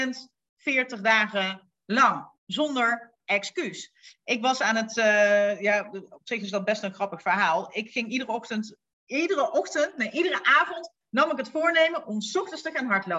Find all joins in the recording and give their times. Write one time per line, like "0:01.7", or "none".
0:02.4